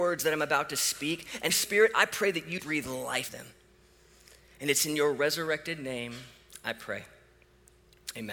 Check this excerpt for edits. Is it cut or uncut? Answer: cut